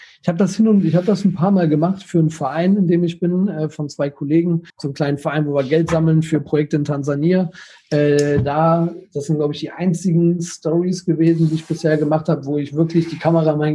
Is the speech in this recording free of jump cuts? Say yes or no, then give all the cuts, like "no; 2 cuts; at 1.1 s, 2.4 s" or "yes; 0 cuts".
no; 1 cut; at 4.7 s